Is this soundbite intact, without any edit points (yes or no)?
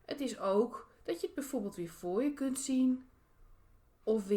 yes